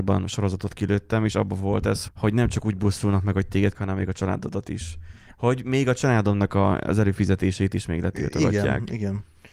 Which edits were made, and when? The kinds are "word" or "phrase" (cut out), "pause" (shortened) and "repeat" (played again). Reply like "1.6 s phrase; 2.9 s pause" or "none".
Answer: 2.1 s word; 3.7 s word